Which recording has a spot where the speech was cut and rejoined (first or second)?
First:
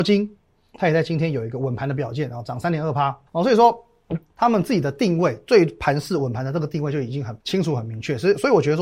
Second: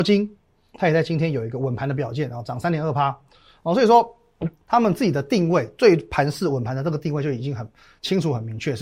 first